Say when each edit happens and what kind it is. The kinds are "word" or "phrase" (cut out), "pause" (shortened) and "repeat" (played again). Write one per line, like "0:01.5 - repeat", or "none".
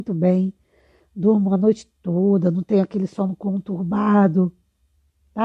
none